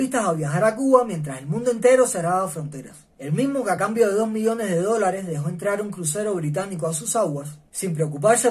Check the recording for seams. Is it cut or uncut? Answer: uncut